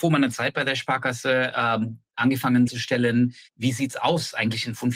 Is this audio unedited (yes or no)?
no